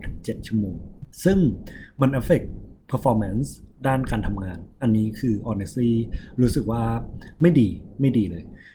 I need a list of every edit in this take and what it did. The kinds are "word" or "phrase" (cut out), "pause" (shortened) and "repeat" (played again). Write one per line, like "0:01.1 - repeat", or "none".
0:01.1 - pause